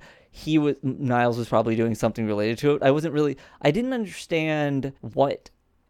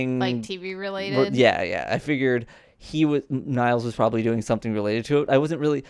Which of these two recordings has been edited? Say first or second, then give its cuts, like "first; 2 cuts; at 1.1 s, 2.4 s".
first; 1 cut; at 5.0 s